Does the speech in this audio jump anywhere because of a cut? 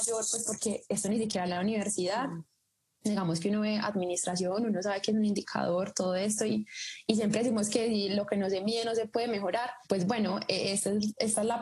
yes; 2 cuts; at 1.4 s, 9.8 s

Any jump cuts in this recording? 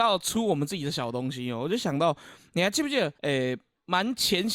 yes; 1 cut; at 3.1 s

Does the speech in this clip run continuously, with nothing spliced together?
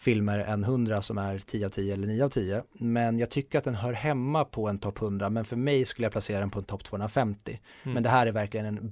yes; 0 cuts

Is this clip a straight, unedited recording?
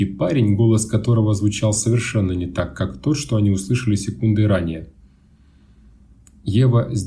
yes; 0 cuts

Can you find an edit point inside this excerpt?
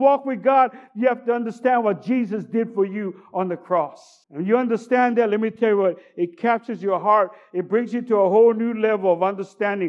yes; 1 cut; at 4.2 s

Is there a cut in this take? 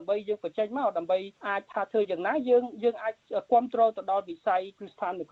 yes; 1 cut; at 1.4 s

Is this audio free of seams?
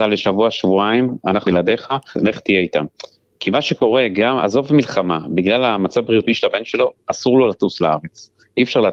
no; 2 cuts; at 1.5 s, 2.1 s

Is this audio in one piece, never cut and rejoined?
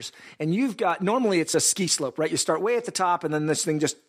yes; 0 cuts

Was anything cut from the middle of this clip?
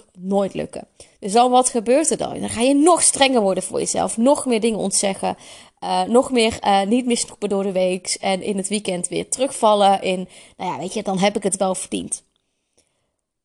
no; 0 cuts

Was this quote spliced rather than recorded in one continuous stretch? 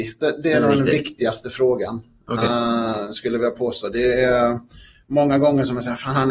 no; 0 cuts

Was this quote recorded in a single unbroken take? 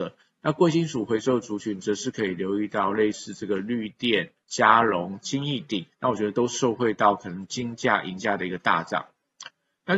no; 2 cuts; at 4.4 s, 5.9 s

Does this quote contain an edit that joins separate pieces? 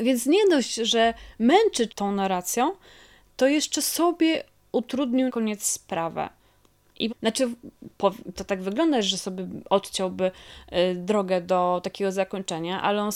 yes; 4 cuts; at 1.9 s, 5.3 s, 7.1 s, 8.4 s

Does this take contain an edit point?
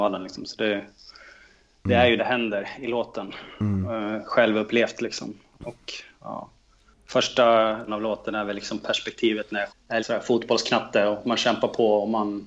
yes; 4 cuts; at 2.2 s, 7.9 s, 9.7 s, 10.0 s

